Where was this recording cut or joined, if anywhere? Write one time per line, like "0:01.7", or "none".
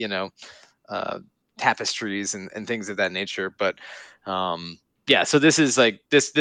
none